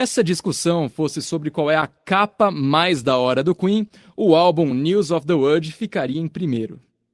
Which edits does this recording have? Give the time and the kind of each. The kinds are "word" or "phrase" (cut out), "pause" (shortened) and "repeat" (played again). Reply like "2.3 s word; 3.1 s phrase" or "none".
none